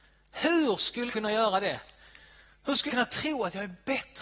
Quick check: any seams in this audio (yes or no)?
yes